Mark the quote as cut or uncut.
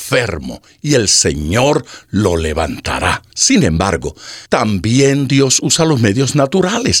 cut